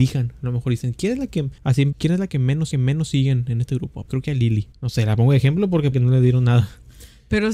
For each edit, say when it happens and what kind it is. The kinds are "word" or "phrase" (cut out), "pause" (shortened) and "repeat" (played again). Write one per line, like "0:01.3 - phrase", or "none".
0:01.6 - pause
0:01.9 - word
0:02.7 - repeat
0:04.1 - word
0:04.7 - pause
0:05.9 - phrase